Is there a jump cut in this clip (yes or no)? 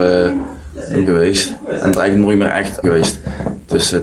yes